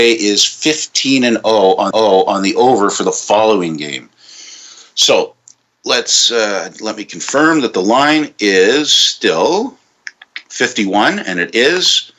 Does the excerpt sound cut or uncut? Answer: cut